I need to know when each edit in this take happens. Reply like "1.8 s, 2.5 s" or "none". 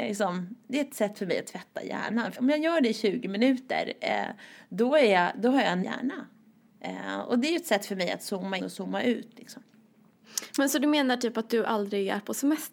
2.3 s, 5.8 s, 8.6 s

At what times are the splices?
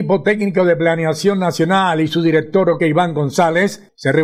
2.8 s

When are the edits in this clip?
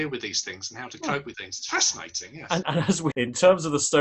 1.3 s, 2.6 s, 3.1 s

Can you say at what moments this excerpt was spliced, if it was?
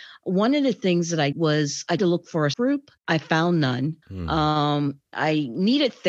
1.3 s, 2.0 s, 2.5 s, 3.0 s, 4.0 s, 5.1 s

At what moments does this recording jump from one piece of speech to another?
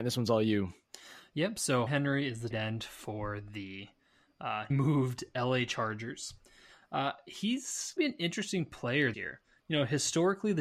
1.9 s, 2.5 s, 4.7 s, 8.0 s, 9.1 s

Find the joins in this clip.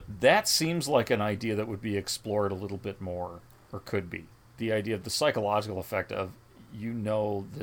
4.4 s

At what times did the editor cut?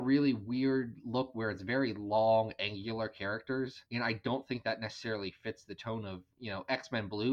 3.9 s

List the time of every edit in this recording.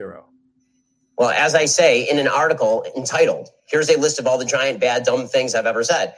none

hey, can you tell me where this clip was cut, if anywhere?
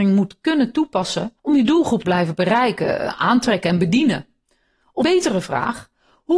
1.4 s, 2.0 s, 5.0 s

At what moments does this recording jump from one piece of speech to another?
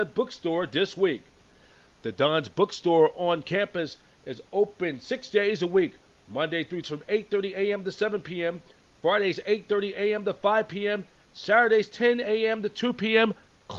6.8 s

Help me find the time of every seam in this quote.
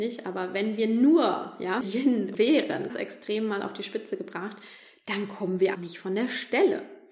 1.8 s, 2.3 s, 2.9 s, 5.7 s

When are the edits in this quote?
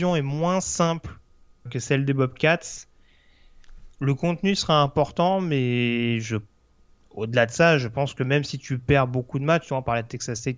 1.7 s

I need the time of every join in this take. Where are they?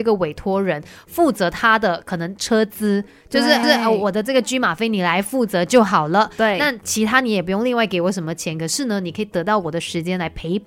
3.6 s

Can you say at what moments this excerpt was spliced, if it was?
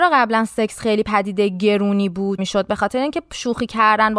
2.4 s

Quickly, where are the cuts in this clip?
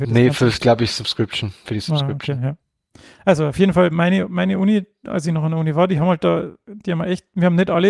none

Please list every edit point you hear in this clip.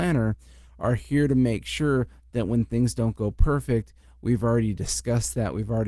none

